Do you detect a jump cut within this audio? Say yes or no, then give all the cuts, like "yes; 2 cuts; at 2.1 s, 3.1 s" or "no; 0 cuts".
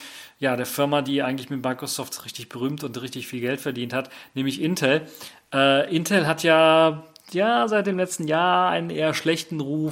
no; 0 cuts